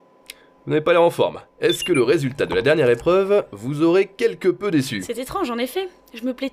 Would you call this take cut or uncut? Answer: cut